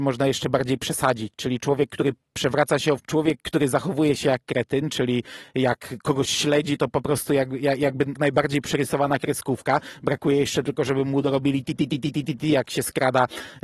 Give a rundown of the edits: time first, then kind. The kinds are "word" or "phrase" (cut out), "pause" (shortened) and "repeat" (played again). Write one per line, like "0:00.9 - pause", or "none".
0:03.0 - word
0:08.1 - word